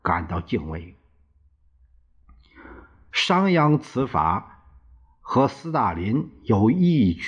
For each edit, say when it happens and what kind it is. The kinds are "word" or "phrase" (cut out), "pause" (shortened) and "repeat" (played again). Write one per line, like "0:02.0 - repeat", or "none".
none